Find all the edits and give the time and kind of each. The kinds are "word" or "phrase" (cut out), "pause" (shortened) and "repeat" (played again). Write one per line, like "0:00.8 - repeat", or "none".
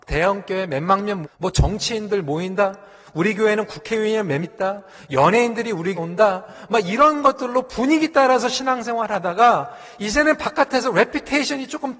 0:01.2 - word
0:04.4 - word
0:06.0 - word